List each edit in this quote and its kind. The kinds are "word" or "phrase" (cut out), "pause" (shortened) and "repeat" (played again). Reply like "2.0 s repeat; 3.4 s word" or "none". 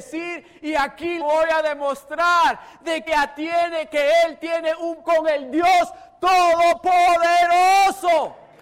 1.2 s word; 3.1 s word; 5.0 s word